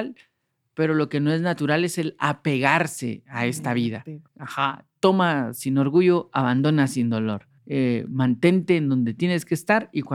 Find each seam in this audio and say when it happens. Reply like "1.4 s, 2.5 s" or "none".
4.3 s, 7.6 s